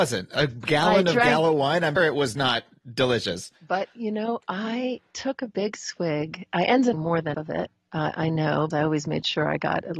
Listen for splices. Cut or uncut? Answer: cut